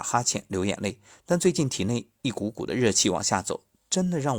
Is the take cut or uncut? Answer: uncut